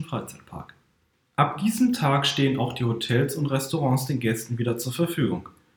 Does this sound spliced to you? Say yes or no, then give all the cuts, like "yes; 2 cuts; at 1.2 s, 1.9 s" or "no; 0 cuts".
no; 0 cuts